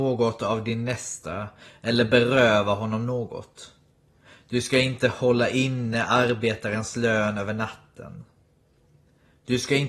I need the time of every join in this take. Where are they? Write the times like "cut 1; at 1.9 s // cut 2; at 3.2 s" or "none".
none